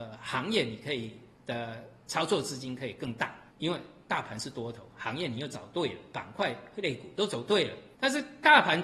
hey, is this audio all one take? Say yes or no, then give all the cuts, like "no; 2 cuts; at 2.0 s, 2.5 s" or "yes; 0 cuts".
no; 4 cuts; at 1.3 s, 3.5 s, 6.1 s, 7.9 s